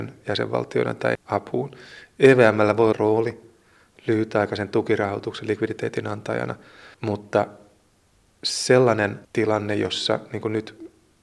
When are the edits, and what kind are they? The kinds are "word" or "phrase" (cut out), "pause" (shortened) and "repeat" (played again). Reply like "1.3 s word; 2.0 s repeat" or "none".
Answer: 1.1 s word; 2.9 s phrase; 6.9 s pause; 9.2 s pause